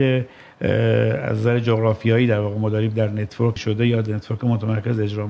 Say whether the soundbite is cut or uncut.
cut